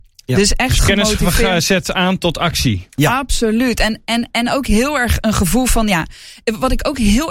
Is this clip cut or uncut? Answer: uncut